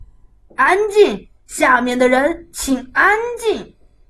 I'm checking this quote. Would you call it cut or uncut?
cut